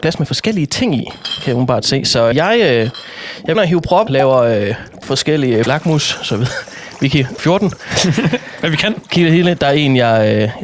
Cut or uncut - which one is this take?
cut